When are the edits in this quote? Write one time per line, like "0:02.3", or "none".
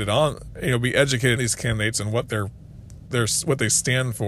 0:01.4
0:03.1